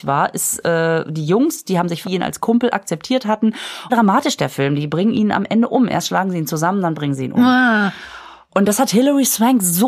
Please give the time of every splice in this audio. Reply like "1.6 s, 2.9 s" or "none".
2.0 s, 3.9 s